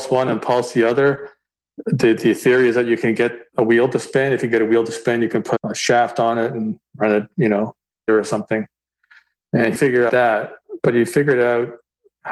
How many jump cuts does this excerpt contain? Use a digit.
4